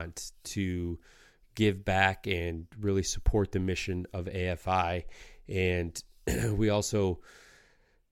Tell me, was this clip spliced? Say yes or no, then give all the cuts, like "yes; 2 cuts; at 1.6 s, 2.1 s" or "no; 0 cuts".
no; 0 cuts